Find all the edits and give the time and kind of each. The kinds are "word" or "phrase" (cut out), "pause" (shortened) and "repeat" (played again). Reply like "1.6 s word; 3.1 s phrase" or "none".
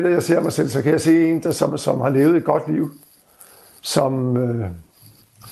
none